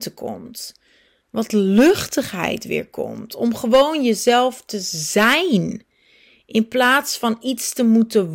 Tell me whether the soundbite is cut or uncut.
uncut